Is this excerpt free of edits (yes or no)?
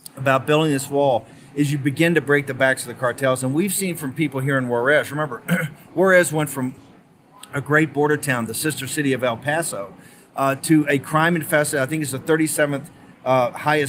yes